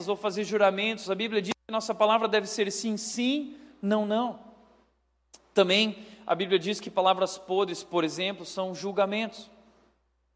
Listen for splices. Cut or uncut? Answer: uncut